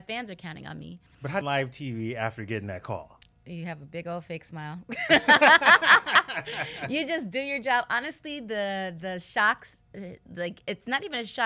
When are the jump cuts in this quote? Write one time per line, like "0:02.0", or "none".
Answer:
0:01.4
0:03.3

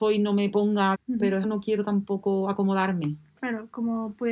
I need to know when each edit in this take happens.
0:00.9
0:01.4

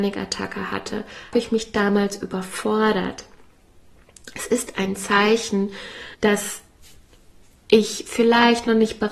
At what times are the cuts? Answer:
0:01.3
0:06.1

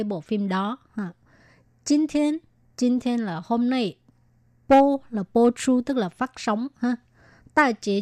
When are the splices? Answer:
none

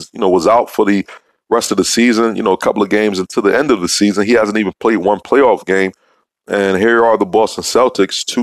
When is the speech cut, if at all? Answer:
none

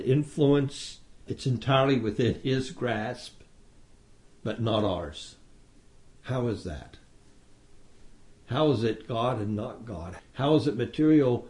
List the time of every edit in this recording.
0:01.2

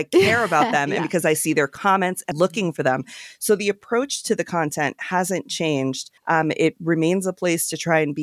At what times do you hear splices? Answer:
0:02.3
0:06.2

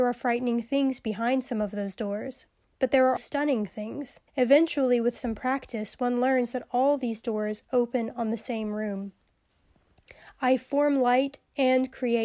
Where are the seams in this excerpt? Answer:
0:03.2
0:04.3

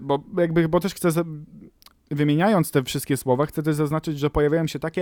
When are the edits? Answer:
none

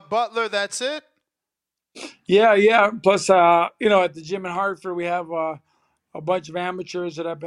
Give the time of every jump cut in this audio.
none

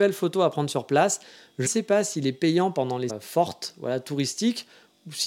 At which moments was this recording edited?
0:01.7
0:03.1

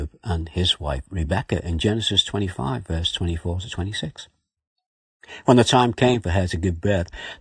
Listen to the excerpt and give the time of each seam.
none

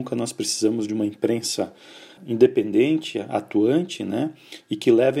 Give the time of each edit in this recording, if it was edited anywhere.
0:02.2

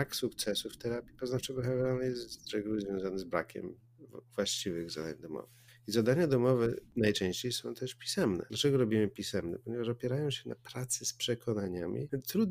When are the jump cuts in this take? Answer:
0:05.7

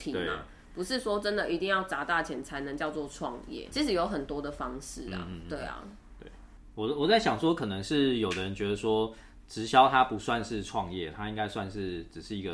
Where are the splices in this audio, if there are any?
0:03.7

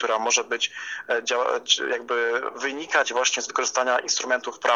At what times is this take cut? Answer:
none

